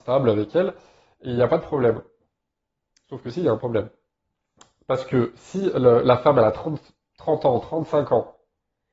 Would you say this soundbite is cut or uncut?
uncut